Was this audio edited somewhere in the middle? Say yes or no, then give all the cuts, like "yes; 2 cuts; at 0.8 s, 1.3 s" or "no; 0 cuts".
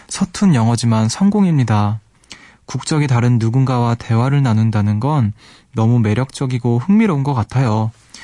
no; 0 cuts